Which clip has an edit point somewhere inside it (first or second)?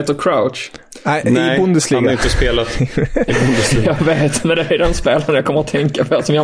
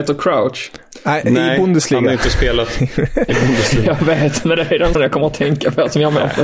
second